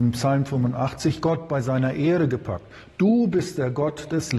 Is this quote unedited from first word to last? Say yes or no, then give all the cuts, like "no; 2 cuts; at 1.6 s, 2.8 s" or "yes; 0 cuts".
yes; 0 cuts